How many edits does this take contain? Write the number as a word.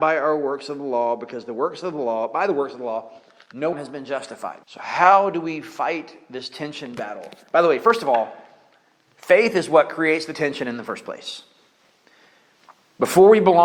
two